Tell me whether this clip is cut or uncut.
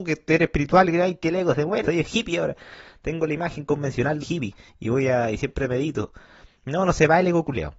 cut